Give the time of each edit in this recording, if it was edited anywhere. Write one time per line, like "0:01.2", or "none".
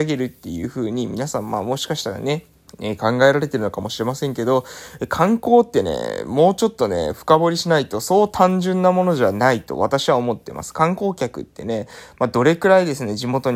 0:02.7